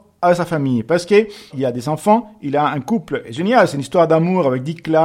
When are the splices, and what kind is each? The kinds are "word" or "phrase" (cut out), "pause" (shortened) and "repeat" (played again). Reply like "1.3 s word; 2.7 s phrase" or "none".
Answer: 1.5 s word; 3.2 s word